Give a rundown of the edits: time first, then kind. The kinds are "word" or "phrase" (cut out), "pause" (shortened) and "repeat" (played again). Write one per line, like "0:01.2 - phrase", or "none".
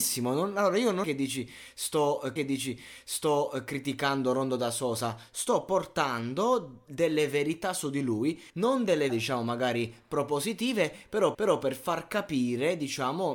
0:01.0 - word
0:02.4 - repeat
0:08.5 - pause
0:09.1 - word
0:11.3 - repeat

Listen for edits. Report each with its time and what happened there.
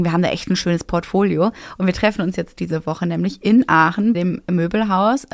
0:04.1 - word

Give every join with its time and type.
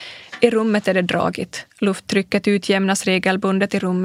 0:01.7 - pause

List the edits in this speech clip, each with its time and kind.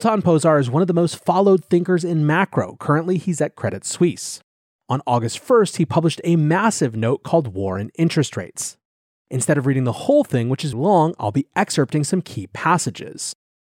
0:10.7 - word

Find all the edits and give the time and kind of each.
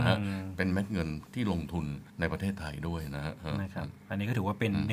0:02.1 - pause

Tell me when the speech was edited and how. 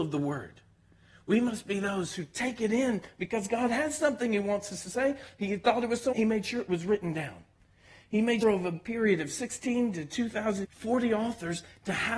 0:06.1 - word
0:08.4 - word
0:10.6 - word

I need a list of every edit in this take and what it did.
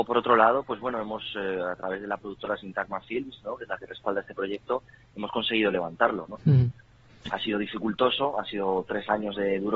none

